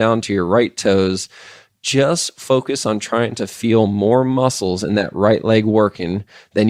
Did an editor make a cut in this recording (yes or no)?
no